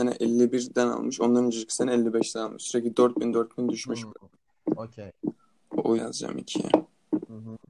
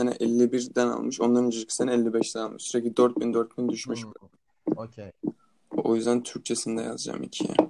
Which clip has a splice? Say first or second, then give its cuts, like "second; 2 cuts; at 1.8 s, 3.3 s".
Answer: first; 1 cut; at 6.0 s